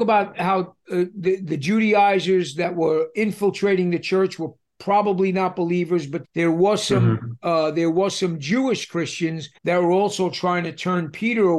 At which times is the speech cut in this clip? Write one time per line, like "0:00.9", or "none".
0:06.2
0:09.6